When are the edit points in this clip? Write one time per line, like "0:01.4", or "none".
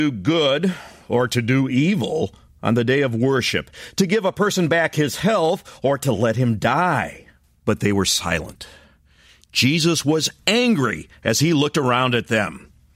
none